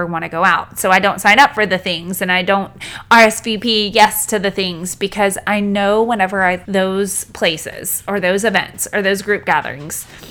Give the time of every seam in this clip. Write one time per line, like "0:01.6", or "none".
0:06.7

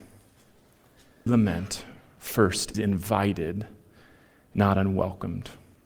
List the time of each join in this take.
0:01.3
0:02.7

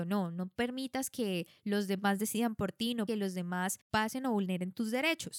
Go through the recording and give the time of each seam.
0:03.1
0:03.8

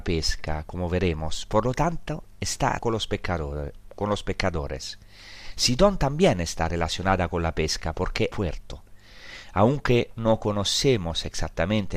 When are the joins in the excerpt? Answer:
0:02.8
0:08.3

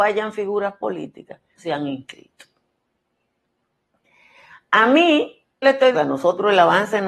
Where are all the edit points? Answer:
0:01.6
0:05.6
0:05.9

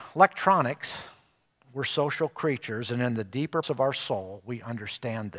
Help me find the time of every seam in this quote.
0:01.5
0:03.6

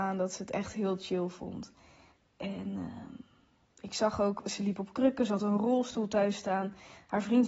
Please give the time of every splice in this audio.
none

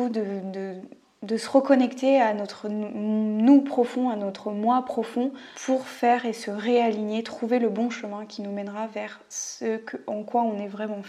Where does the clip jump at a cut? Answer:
0:05.5

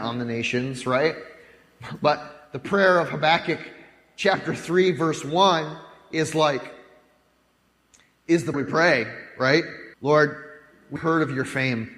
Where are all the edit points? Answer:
0:08.5
0:09.9
0:11.0

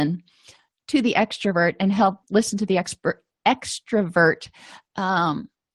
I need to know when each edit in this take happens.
0:02.2

